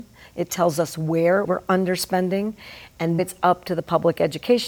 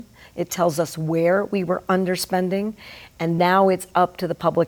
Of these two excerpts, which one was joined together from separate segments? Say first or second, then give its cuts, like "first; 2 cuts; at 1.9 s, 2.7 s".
first; 2 cuts; at 1.5 s, 3.2 s